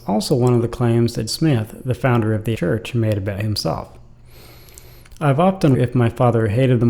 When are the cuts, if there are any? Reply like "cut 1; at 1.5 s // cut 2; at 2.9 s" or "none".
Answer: cut 1; at 1.3 s // cut 2; at 2.5 s // cut 3; at 5.7 s